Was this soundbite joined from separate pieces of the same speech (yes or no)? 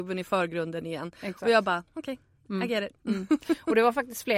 yes